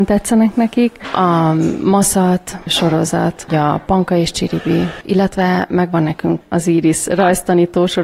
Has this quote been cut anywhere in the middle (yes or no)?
yes